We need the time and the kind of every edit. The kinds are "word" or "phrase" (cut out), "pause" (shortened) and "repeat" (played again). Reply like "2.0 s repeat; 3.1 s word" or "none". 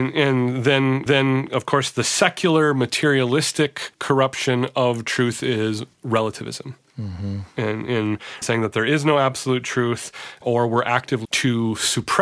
1.1 s repeat; 3.9 s pause; 8.4 s word; 10.4 s word; 11.2 s word